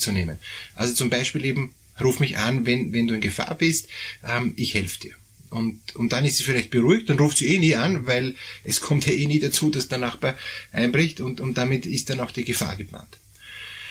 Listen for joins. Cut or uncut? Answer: uncut